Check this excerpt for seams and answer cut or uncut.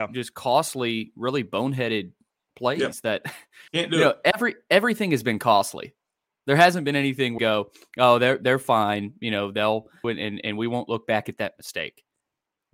cut